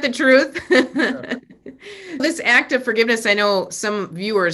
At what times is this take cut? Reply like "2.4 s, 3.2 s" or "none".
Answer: 2.2 s